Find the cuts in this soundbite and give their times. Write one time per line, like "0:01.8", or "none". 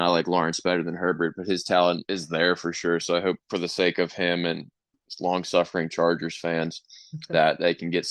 0:02.0
0:03.4